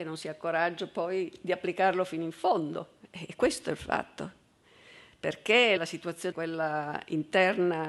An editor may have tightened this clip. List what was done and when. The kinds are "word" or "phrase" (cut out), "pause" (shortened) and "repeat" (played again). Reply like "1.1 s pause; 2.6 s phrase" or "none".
5.8 s word; 6.3 s phrase